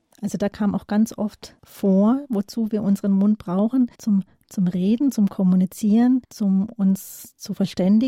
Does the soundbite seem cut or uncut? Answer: cut